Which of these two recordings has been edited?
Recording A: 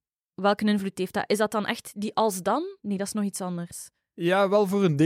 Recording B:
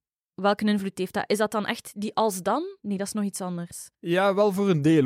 B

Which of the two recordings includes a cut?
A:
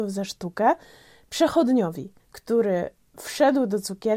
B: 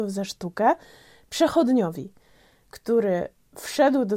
A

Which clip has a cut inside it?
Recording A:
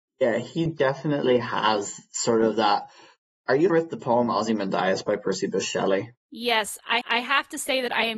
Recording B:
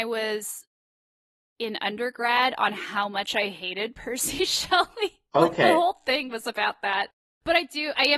A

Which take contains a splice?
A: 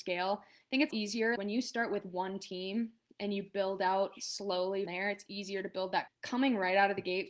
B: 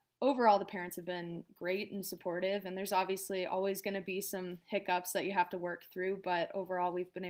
A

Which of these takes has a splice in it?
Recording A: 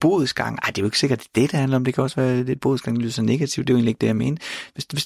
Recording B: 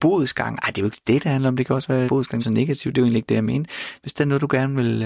B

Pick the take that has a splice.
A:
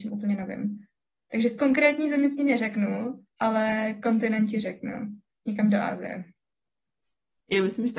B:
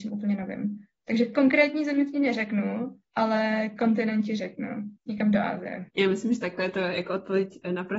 B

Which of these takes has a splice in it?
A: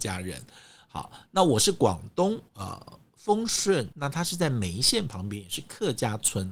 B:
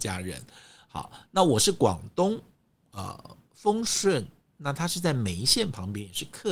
A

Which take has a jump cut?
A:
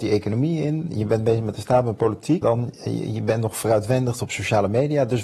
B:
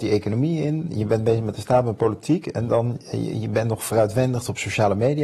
A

